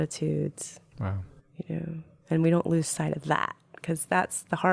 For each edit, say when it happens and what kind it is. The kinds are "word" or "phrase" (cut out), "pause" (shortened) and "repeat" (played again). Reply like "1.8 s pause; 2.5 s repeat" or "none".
1.4 s pause